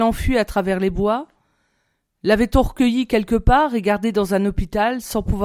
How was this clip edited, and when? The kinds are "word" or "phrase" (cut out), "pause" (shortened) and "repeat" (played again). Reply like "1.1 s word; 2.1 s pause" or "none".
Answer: none